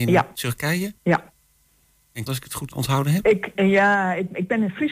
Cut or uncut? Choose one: cut